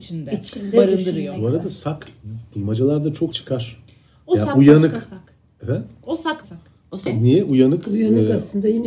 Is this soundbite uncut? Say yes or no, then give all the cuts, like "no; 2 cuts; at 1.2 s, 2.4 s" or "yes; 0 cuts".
no; 3 cuts; at 3.3 s, 6.4 s, 7.1 s